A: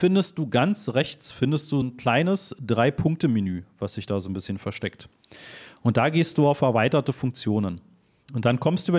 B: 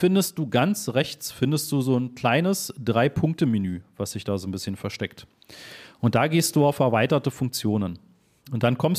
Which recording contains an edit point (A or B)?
A